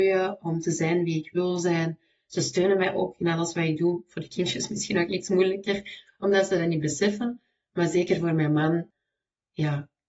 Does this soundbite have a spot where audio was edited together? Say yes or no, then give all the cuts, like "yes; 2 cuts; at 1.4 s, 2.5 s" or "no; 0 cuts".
no; 0 cuts